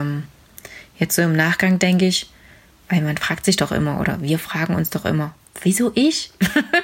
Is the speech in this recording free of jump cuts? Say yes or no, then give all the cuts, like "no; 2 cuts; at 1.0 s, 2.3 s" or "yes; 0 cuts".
yes; 0 cuts